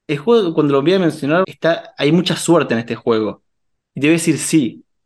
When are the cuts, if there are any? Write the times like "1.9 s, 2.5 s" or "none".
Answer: 1.4 s